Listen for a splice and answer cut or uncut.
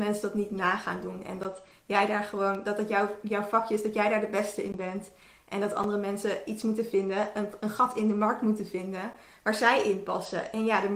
uncut